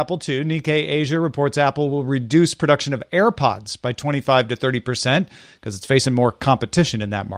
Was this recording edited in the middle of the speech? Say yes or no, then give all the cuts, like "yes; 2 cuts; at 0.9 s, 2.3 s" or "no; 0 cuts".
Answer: no; 0 cuts